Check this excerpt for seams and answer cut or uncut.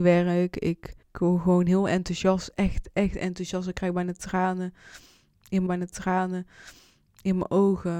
cut